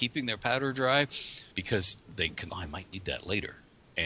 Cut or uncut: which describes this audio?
cut